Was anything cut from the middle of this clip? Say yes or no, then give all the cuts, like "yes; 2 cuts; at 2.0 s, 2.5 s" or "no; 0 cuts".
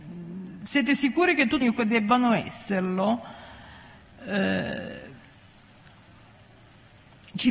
yes; 1 cut; at 1.6 s